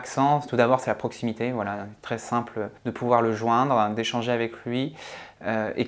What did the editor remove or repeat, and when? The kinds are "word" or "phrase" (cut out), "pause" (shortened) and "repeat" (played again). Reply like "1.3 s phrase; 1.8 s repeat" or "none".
2.8 s pause